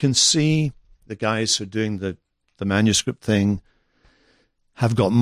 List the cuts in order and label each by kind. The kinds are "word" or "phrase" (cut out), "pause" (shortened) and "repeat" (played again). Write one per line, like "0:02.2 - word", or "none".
none